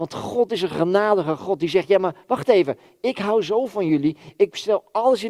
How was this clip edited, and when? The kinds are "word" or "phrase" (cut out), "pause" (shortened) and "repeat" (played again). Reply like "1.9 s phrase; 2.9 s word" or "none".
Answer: none

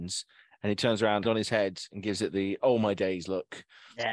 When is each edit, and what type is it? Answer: 1.2 s word

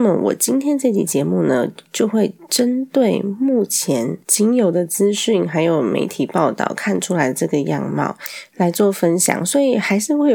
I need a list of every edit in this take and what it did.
4.2 s pause

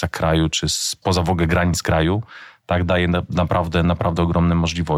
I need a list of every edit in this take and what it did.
none

